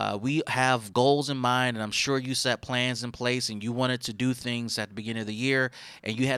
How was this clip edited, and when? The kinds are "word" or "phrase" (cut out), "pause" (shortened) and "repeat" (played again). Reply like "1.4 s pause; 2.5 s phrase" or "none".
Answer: none